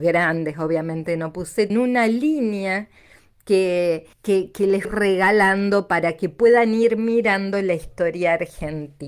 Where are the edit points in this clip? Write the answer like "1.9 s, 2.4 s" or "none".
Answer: 1.7 s, 4.1 s, 4.8 s